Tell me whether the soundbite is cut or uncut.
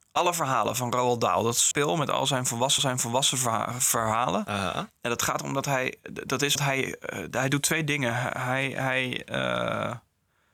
cut